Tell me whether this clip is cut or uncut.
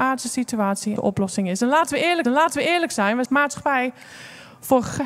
cut